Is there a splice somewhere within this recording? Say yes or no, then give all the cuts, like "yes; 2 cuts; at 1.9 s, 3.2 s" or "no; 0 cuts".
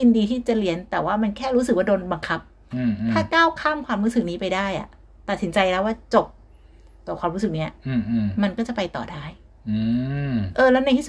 no; 0 cuts